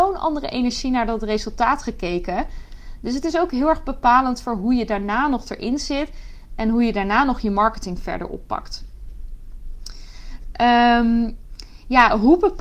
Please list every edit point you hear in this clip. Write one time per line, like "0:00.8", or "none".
none